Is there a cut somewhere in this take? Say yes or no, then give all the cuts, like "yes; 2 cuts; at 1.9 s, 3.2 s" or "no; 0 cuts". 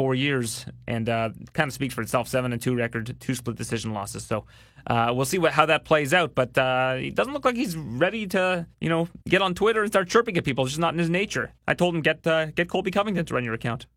yes; 3 cuts; at 8.7 s, 9.2 s, 11.6 s